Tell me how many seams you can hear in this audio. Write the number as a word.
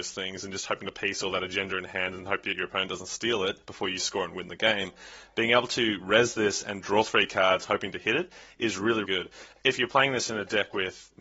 two